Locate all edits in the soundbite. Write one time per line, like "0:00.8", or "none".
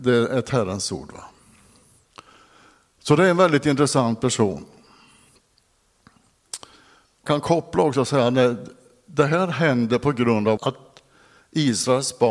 0:07.3
0:10.6

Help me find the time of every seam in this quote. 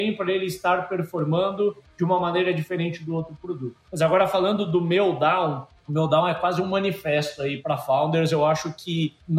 0:03.8

